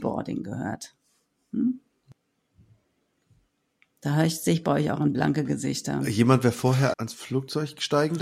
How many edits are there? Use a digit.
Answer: 1